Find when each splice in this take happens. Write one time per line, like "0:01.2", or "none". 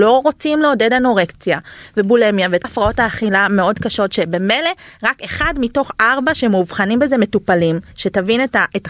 0:02.6